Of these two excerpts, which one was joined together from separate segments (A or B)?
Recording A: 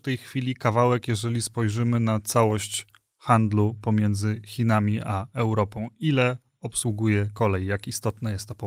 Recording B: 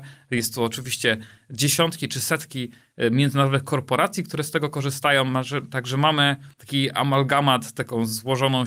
B